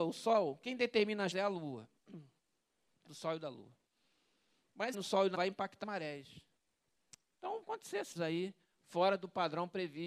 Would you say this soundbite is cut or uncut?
cut